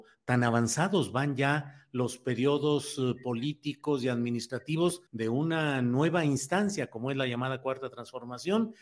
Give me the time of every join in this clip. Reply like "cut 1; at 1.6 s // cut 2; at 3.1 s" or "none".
cut 1; at 5.1 s